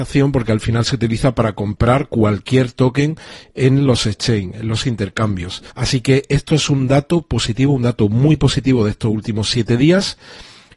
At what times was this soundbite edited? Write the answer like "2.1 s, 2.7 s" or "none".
5.7 s